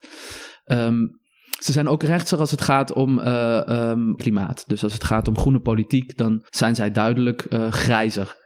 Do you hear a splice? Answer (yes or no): yes